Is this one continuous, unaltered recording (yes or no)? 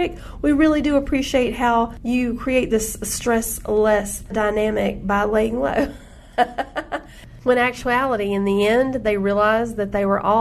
yes